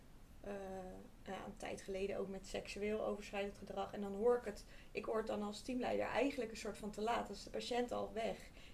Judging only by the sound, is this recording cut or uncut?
cut